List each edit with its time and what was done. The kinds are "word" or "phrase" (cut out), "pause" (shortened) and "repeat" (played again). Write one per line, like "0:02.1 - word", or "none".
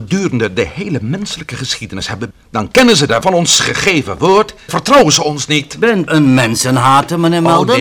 0:02.3 - word
0:03.2 - word
0:04.7 - phrase
0:06.1 - word

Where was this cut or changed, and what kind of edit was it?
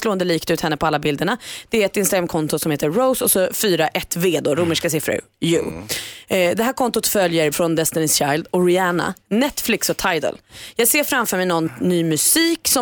0:07.5 - phrase

